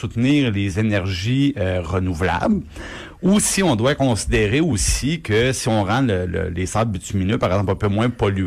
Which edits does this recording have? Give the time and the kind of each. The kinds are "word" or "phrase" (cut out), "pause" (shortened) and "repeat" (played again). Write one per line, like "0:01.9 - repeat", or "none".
0:06.3 - word